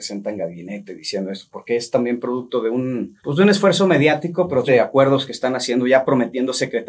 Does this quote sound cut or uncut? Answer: cut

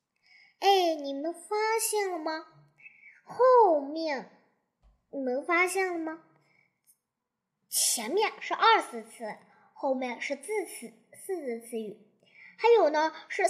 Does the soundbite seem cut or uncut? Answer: uncut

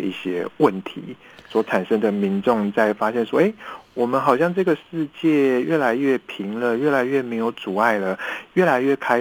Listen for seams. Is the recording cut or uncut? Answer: uncut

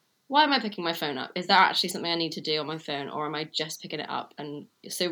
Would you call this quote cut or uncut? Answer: uncut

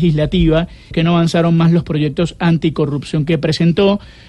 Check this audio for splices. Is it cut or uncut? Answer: cut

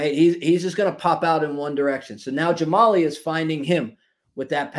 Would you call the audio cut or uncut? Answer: uncut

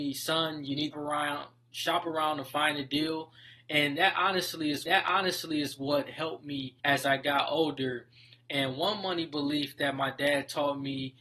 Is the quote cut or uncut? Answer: cut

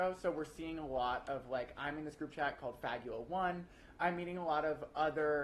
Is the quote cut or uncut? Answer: uncut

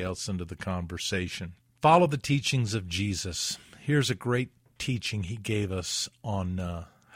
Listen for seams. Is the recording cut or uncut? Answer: uncut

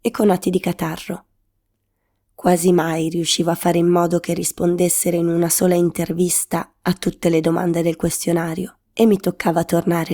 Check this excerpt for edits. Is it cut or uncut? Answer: uncut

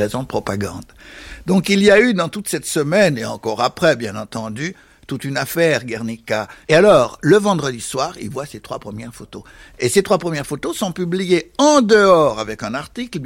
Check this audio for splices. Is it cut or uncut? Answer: uncut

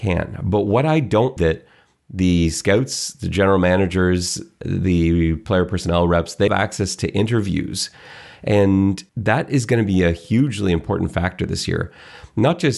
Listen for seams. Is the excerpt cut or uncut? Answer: cut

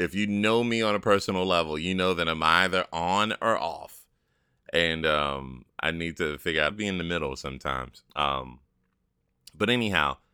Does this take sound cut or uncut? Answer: cut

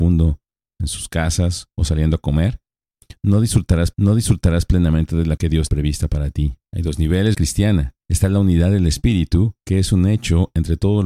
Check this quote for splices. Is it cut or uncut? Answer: cut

